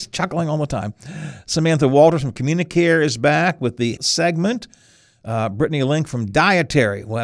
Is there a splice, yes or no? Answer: yes